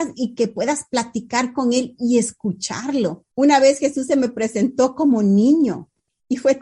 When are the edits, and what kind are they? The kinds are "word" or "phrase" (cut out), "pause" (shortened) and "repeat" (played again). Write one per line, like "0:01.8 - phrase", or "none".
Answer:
0:03.3 - pause